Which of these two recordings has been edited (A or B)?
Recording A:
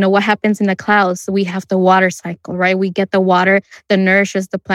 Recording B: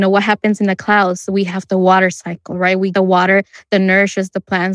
B